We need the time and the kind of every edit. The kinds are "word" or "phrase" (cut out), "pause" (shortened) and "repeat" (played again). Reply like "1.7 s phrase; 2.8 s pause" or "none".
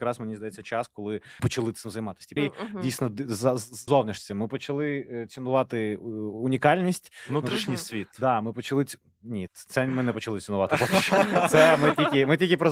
1.4 s word; 2.4 s phrase; 3.9 s phrase; 9.5 s word